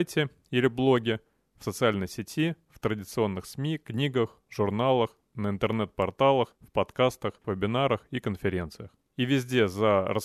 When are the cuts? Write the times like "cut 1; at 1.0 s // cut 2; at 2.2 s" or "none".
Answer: cut 1; at 6.5 s // cut 2; at 7.4 s